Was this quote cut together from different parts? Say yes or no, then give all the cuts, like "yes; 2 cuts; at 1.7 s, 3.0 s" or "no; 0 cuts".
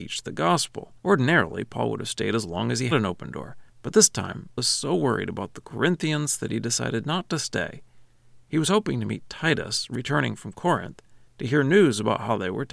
yes; 4 cuts; at 1.0 s, 2.9 s, 3.7 s, 4.6 s